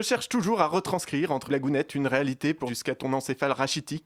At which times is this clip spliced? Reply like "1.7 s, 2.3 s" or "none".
1.5 s, 2.7 s